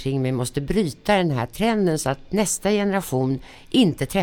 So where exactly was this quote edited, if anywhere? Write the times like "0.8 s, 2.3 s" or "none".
none